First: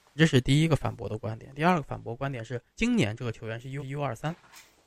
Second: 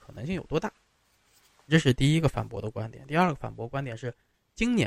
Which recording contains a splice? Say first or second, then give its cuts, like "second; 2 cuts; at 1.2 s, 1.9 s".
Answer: first; 2 cuts; at 2.7 s, 3.8 s